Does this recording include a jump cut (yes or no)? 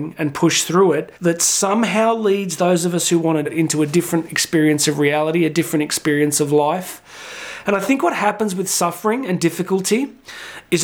yes